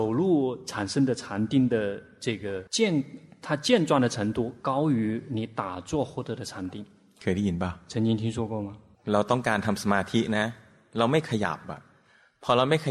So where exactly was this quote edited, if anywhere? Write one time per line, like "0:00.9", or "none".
0:02.7
0:08.9